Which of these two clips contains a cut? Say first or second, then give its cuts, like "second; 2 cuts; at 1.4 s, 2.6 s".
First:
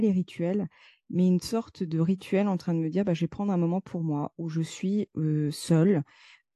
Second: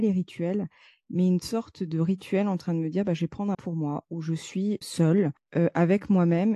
second; 3 cuts; at 3.5 s, 4.8 s, 5.4 s